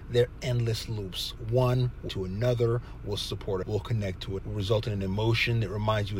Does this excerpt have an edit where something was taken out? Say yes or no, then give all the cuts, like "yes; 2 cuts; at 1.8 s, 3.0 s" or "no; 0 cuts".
yes; 3 cuts; at 2.1 s, 3.6 s, 4.4 s